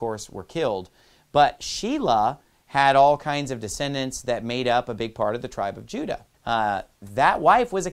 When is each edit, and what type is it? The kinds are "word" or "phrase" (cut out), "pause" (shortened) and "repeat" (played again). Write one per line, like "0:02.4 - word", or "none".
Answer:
0:06.3 - pause

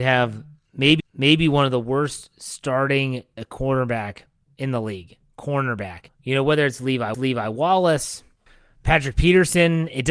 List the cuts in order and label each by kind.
0:01.0 - repeat
0:03.4 - word
0:07.1 - repeat

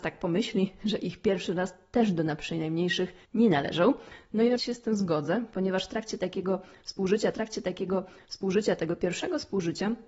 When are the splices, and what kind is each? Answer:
0:03.2 - pause
0:04.6 - word
0:07.3 - repeat

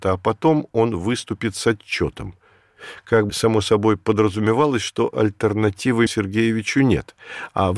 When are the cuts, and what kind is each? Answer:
0:03.3 - word
0:06.1 - word

